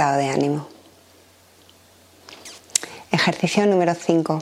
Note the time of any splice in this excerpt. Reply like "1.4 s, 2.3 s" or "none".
none